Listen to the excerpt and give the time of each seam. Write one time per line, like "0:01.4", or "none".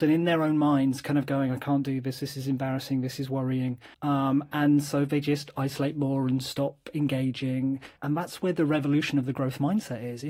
0:03.9
0:08.0